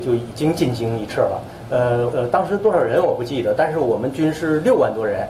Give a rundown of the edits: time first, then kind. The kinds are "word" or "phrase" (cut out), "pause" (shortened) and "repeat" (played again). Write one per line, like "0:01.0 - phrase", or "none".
0:02.1 - word